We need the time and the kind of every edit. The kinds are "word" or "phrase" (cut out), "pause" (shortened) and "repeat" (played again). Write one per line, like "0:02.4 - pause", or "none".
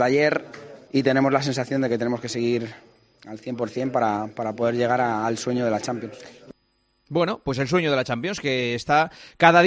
none